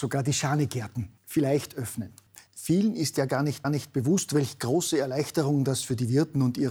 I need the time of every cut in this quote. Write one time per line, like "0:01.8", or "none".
0:01.2
0:02.5
0:03.6